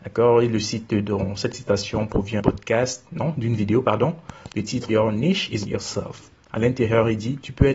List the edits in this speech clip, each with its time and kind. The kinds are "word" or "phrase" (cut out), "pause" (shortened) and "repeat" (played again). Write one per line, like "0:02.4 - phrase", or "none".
0:02.4 - word
0:03.1 - word
0:04.9 - word
0:05.7 - word